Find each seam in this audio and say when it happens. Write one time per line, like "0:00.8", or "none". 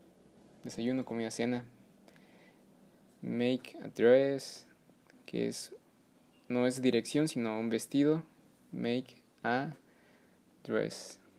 none